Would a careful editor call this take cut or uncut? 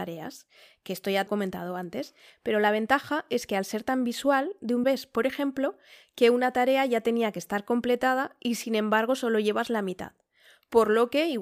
cut